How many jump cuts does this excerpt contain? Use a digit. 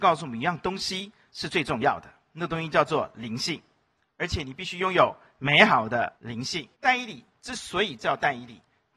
2